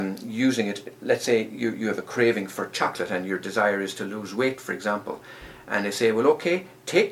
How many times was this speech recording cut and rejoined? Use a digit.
0